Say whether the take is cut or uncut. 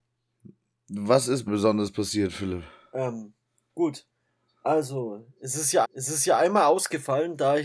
cut